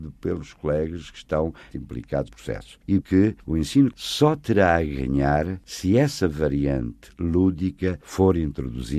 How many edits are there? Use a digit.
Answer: 5